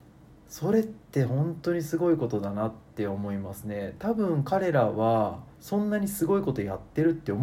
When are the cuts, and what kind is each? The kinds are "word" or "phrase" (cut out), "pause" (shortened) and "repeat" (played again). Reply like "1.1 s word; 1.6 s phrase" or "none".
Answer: 5.5 s pause